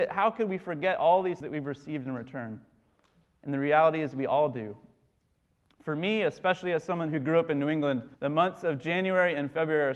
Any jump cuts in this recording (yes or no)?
yes